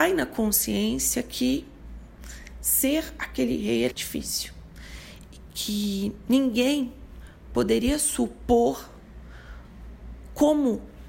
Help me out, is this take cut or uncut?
cut